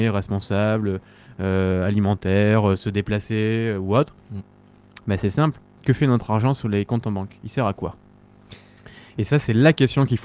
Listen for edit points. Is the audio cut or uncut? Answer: uncut